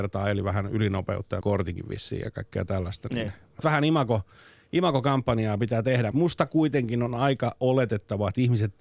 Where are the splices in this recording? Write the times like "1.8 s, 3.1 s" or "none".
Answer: 1.4 s, 3.6 s, 6.1 s